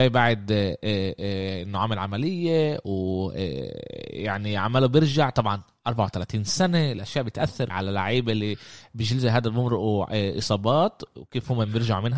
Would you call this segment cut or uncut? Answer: cut